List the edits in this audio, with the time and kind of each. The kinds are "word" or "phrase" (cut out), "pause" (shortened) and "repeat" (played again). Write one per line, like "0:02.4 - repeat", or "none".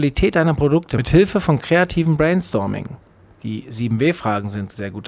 none